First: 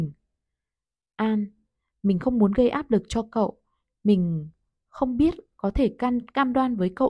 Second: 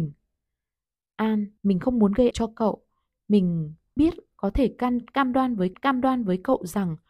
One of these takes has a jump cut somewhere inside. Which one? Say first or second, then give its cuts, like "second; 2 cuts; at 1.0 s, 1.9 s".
second; 4 cuts; at 1.6 s, 2.3 s, 4.0 s, 5.7 s